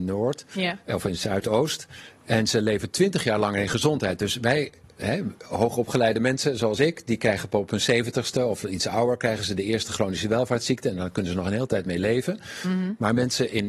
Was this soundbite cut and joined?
no; 0 cuts

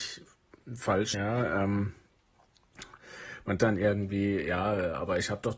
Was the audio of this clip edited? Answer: yes; 2 cuts; at 1.1 s, 3.6 s

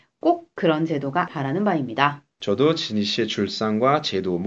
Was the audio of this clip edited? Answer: yes; 2 cuts; at 1.3 s, 2.3 s

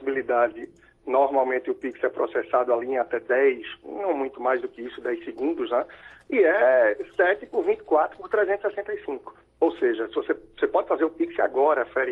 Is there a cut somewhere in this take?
no; 0 cuts

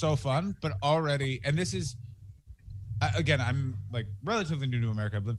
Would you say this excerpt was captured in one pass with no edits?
yes; 0 cuts

